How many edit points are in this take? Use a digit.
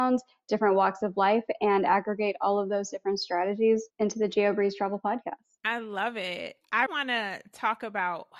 3